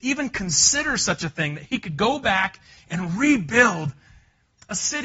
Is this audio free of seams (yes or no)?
yes